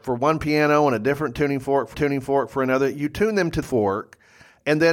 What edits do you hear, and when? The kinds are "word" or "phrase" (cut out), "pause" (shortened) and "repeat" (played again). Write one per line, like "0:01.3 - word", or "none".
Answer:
0:01.9 - repeat
0:03.6 - phrase